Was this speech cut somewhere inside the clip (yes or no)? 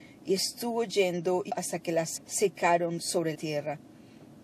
yes